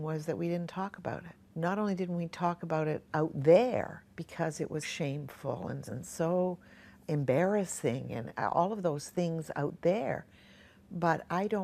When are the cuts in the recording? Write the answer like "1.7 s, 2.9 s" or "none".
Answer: 1.4 s, 4.1 s, 4.8 s, 5.8 s